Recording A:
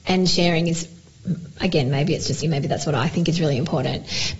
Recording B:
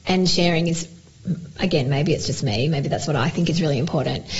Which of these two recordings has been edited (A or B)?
A